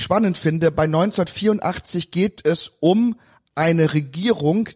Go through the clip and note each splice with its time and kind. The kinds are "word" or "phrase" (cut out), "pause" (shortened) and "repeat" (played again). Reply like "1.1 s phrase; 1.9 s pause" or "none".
none